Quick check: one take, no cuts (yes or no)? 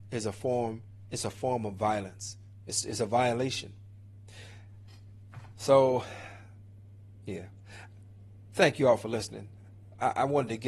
yes